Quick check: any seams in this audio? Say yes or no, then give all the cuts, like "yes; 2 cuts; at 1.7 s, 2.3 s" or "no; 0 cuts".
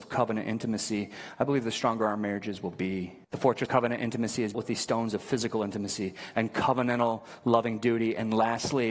yes; 3 cuts; at 3.2 s, 3.7 s, 4.5 s